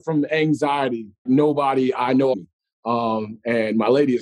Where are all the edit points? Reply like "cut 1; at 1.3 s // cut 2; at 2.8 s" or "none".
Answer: cut 1; at 1.3 s // cut 2; at 2.3 s